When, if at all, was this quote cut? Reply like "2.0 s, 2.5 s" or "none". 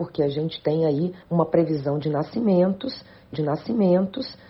1.2 s, 3.3 s